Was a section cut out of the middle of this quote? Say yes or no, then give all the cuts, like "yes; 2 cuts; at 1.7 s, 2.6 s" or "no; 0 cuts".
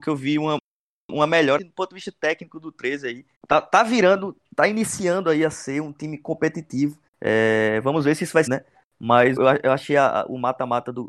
yes; 6 cuts; at 1.6 s, 3.3 s, 4.4 s, 7.1 s, 8.5 s, 9.4 s